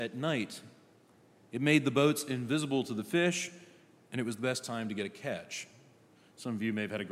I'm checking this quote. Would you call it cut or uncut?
uncut